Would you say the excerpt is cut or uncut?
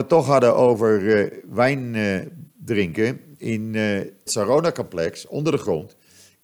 cut